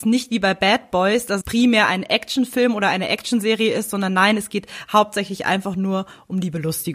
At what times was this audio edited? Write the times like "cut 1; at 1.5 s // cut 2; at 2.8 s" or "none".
cut 1; at 1.4 s

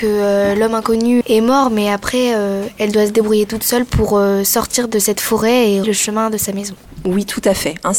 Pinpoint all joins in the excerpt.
cut 1; at 1.2 s // cut 2; at 5.8 s

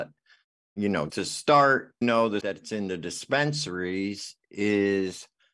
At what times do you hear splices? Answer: cut 1; at 1.1 s // cut 2; at 2.0 s // cut 3; at 2.4 s

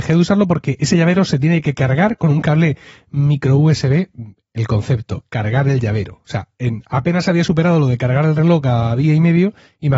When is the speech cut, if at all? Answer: none

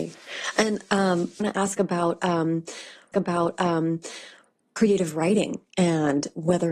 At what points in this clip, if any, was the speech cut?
cut 1; at 1.4 s // cut 2; at 3.1 s

